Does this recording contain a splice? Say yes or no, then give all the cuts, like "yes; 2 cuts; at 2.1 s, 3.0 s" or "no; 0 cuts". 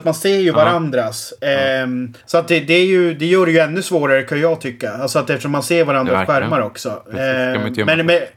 yes; 1 cut; at 2.2 s